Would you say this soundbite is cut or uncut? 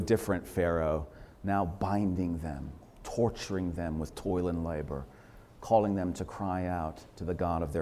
uncut